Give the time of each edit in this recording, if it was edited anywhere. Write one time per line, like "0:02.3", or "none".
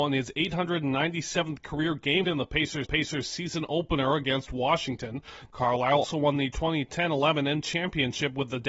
0:02.2
0:02.8
0:06.0
0:07.6